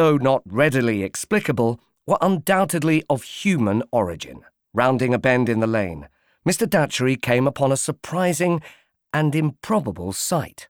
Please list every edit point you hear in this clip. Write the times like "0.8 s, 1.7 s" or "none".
4.6 s